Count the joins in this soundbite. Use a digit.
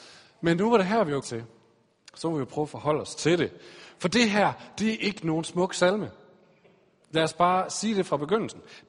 1